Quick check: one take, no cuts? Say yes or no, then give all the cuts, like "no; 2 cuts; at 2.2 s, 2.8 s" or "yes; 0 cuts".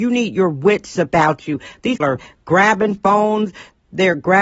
no; 1 cut; at 2.0 s